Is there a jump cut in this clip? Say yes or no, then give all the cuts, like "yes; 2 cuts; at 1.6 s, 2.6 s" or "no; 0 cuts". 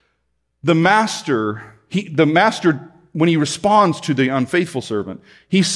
no; 0 cuts